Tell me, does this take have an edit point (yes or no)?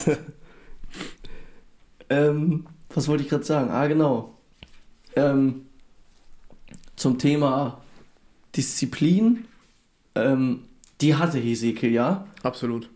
no